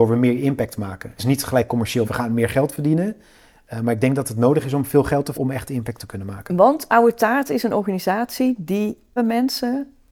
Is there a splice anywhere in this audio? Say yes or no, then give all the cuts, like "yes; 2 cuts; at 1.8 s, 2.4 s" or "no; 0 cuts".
yes; 4 cuts; at 1.2 s, 2.0 s, 5.3 s, 9.2 s